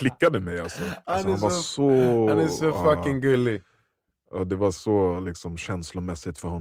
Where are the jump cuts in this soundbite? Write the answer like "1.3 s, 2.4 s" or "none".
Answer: none